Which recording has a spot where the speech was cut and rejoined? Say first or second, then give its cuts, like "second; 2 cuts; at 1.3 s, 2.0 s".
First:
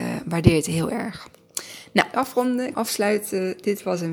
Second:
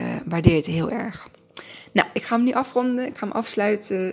first; 2 cuts; at 2.1 s, 2.7 s